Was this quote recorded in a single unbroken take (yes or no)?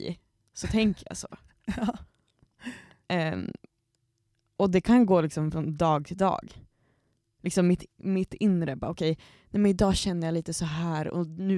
yes